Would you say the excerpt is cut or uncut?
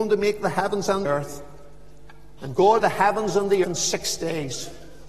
cut